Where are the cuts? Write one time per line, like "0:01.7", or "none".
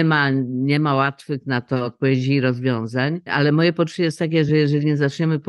none